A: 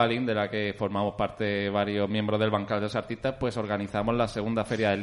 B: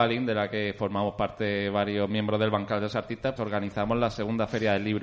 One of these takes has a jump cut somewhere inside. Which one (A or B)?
B